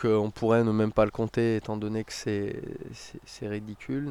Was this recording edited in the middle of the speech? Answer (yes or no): no